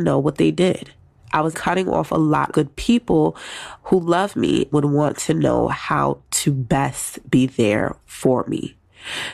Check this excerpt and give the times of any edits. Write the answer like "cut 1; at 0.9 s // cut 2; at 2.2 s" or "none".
cut 1; at 1.5 s // cut 2; at 2.5 s // cut 3; at 4.7 s